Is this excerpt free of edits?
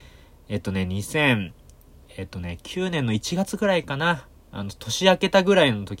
yes; 0 cuts

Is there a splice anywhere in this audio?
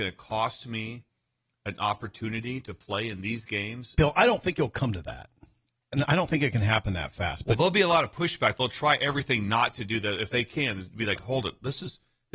no; 0 cuts

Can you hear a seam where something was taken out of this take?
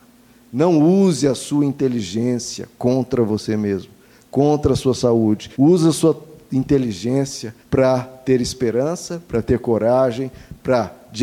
yes; 2 cuts; at 5.5 s, 7.6 s

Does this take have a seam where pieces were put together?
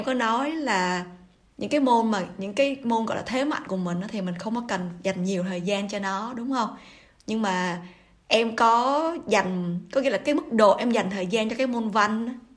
no; 0 cuts

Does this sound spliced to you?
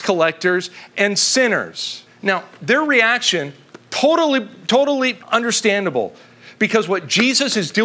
yes; 2 cuts; at 2.1 s, 5.2 s

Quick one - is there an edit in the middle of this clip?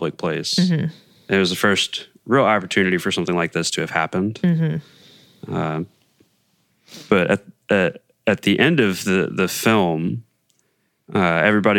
no; 0 cuts

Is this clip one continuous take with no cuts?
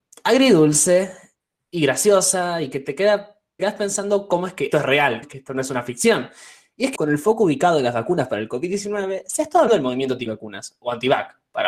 no; 5 cuts; at 3.6 s, 4.7 s, 5.2 s, 7.0 s, 9.7 s

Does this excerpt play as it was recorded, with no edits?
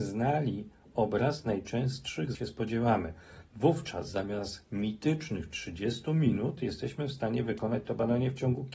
no; 1 cut; at 2.3 s

